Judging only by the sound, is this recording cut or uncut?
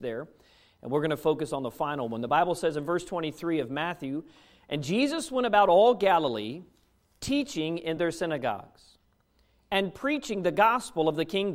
uncut